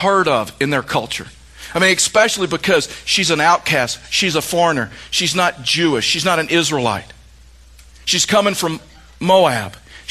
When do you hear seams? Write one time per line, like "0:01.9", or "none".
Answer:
none